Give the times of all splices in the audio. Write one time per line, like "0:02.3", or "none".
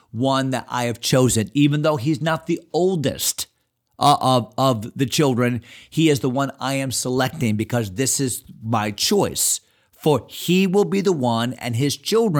none